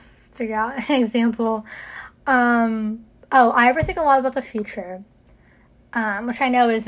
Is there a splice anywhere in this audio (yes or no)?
no